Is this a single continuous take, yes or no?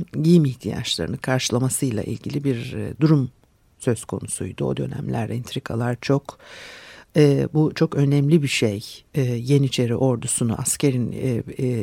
yes